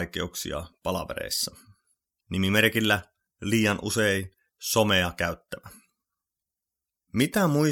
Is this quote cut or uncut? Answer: uncut